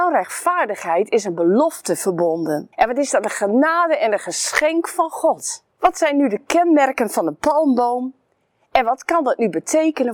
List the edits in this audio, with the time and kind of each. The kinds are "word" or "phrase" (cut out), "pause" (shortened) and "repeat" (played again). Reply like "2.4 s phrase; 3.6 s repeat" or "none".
2.7 s pause; 5.7 s pause